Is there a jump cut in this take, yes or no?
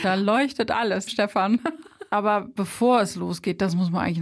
yes